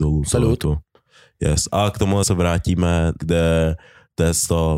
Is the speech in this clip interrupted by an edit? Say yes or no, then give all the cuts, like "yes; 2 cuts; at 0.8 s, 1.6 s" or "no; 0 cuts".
yes; 2 cuts; at 2.2 s, 3.2 s